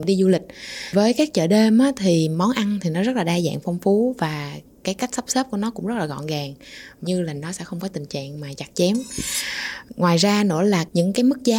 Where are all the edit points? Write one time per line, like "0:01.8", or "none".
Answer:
0:07.0